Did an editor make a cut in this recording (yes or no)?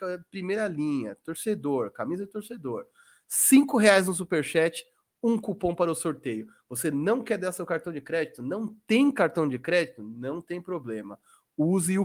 no